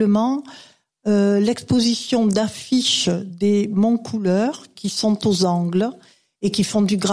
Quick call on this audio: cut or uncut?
cut